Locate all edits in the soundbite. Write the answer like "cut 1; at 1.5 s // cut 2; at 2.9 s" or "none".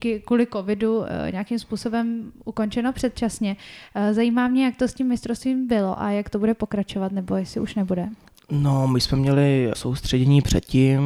cut 1; at 8.2 s // cut 2; at 9.7 s